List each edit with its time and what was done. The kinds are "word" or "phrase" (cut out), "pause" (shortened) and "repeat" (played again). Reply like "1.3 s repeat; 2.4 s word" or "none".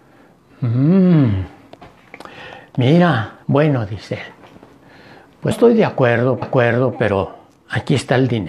3.4 s pause; 5.5 s word; 6.4 s repeat